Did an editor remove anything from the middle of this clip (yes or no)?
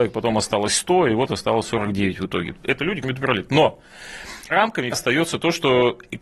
yes